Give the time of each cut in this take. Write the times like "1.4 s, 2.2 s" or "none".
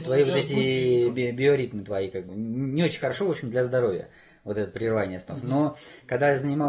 2.3 s